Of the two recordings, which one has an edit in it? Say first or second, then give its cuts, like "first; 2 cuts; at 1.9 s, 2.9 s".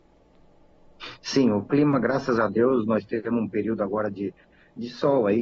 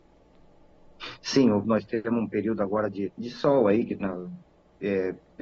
second; 3 cuts; at 1.6 s, 3.1 s, 4.0 s